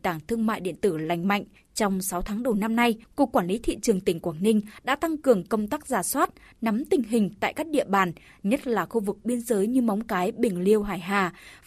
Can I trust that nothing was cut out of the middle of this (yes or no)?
yes